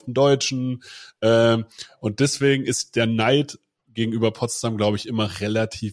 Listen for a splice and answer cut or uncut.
uncut